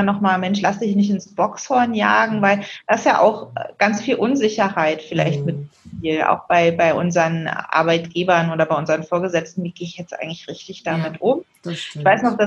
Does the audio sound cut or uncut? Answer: uncut